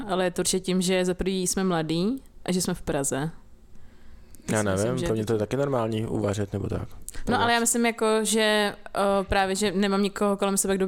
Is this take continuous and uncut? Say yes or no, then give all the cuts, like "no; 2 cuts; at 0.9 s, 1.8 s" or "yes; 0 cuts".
yes; 0 cuts